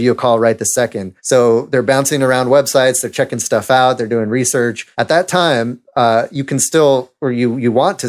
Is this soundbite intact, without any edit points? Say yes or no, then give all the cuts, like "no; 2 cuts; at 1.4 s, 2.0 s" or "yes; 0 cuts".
no; 2 cuts; at 1.2 s, 4.9 s